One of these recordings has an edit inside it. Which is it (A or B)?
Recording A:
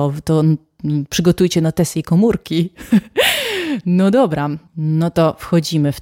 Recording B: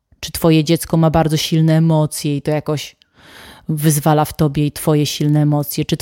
A